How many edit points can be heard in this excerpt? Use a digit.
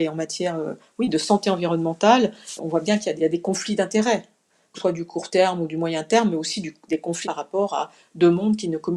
4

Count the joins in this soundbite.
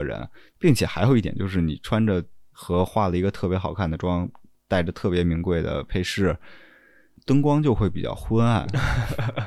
0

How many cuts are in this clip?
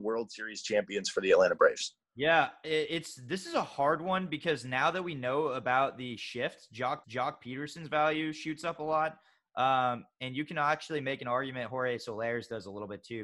1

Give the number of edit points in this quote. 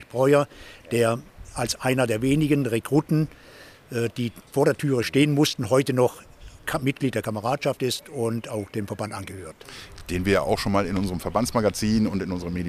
1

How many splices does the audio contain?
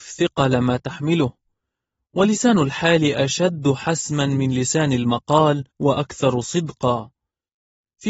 1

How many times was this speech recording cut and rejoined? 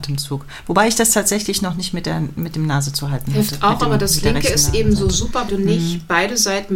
1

